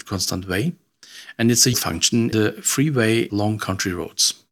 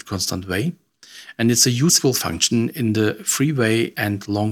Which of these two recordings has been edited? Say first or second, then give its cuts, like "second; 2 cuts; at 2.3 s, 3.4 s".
first; 3 cuts; at 1.7 s, 2.3 s, 3.3 s